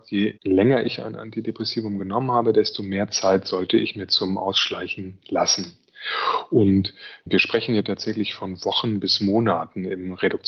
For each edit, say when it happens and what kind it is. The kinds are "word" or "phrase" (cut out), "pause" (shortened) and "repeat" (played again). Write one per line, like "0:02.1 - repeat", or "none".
none